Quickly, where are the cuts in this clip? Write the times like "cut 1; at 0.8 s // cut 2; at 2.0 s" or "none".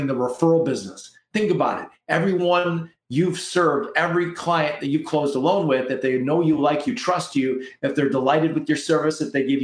none